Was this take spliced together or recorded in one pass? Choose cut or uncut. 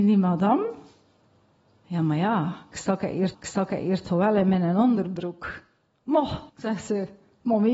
cut